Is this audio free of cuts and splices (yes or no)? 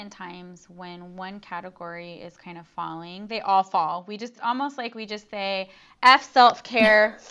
no